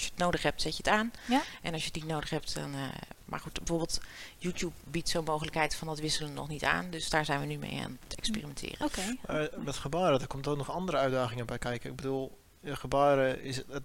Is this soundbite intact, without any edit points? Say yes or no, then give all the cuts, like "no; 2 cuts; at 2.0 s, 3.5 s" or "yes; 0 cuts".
yes; 0 cuts